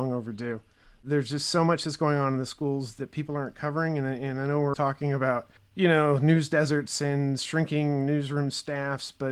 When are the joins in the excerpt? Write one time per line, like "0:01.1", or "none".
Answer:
0:04.7
0:05.6